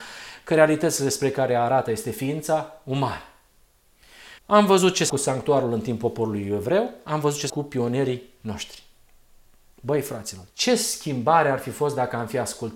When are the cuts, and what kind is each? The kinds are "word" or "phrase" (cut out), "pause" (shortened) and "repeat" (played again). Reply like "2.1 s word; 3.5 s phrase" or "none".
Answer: 4.4 s pause; 5.1 s word; 7.5 s word; 10.5 s pause